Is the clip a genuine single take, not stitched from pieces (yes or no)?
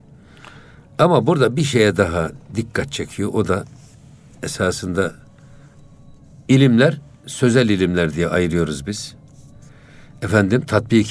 yes